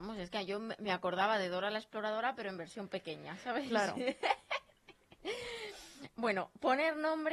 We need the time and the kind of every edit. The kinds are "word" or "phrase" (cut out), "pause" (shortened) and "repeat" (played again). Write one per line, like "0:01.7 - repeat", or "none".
none